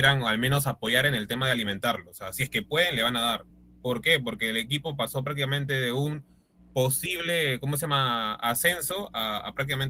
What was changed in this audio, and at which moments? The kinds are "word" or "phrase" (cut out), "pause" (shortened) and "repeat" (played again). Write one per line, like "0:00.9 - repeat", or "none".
none